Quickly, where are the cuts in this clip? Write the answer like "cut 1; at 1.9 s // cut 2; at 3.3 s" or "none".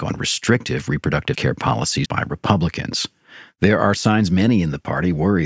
cut 1; at 1.3 s // cut 2; at 2.0 s